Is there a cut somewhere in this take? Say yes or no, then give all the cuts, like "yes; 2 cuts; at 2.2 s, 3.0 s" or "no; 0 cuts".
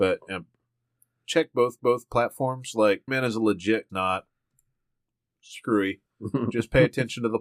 yes; 4 cuts; at 1.8 s, 3.1 s, 3.9 s, 6.1 s